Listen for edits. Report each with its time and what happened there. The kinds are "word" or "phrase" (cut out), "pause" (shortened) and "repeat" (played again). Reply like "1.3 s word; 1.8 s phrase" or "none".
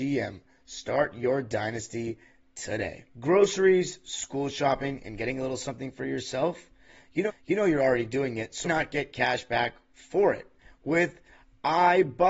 3.1 s pause; 7.3 s repeat; 8.6 s word